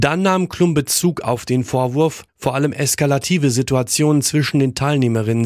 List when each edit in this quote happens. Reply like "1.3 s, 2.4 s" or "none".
2.3 s